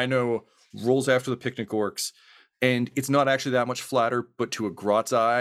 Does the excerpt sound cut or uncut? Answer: uncut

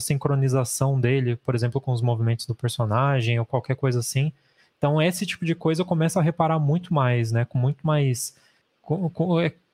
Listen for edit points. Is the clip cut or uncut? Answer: uncut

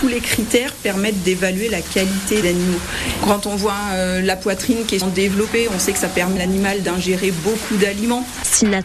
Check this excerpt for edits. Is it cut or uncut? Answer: cut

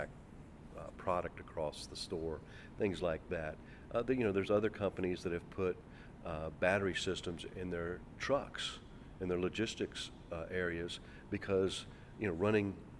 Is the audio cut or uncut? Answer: uncut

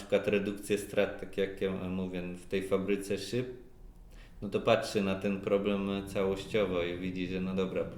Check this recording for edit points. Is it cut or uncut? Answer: uncut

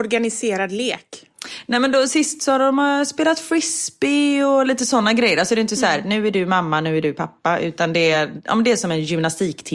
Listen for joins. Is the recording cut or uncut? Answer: uncut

